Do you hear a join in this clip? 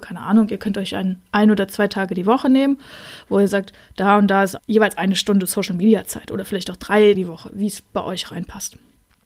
yes; 2 cuts; at 4.6 s, 7.2 s

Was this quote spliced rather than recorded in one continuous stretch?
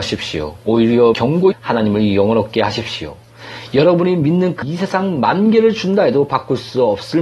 yes; 3 cuts; at 1.1 s, 1.5 s, 4.6 s

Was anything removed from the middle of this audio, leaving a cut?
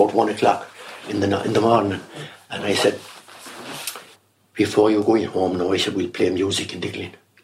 yes; 1 cut; at 4.1 s

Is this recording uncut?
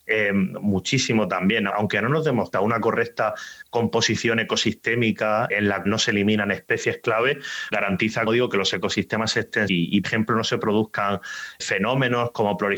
no; 9 cuts; at 1.7 s, 2.5 s, 5.5 s, 5.8 s, 7.7 s, 8.3 s, 9.7 s, 10.0 s, 11.6 s

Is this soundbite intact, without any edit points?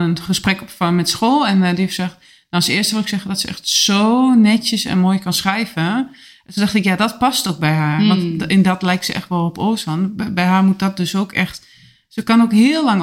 yes; 0 cuts

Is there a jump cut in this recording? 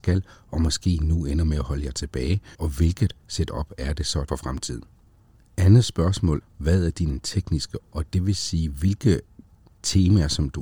yes; 5 cuts; at 2.5 s, 4.3 s, 5.1 s, 6.4 s, 7.8 s

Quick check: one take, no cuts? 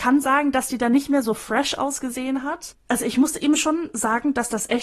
yes; 0 cuts

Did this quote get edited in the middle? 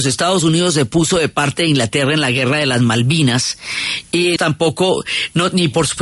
yes; 1 cut; at 4.4 s

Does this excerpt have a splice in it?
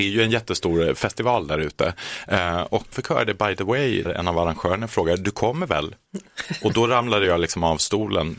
yes; 2 cuts; at 2.9 s, 4.0 s

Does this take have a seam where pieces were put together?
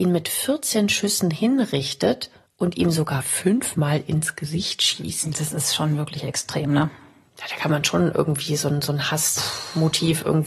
no; 0 cuts

